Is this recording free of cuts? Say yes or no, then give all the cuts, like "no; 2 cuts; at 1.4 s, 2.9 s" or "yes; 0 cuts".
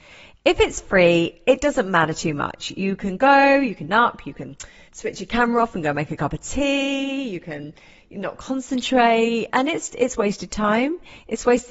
no; 2 cuts; at 3.9 s, 9.9 s